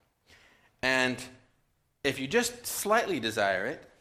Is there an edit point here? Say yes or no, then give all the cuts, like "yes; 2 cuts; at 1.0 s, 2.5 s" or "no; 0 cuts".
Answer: no; 0 cuts